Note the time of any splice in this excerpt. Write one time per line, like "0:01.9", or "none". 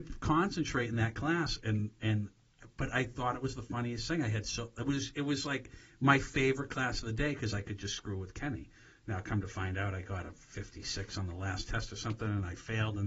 none